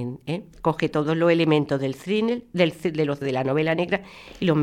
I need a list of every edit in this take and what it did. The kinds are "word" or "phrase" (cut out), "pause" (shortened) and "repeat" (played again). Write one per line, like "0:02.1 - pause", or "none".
0:03.2 - word